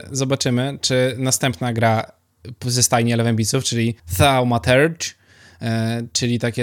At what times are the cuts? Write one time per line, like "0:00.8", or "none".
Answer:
0:04.0